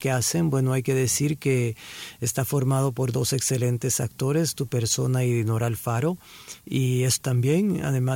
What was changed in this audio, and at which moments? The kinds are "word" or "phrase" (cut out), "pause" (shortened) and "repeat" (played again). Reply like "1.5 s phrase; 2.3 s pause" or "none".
7.2 s word